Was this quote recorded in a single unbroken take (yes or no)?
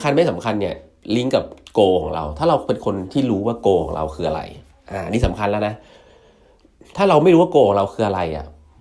yes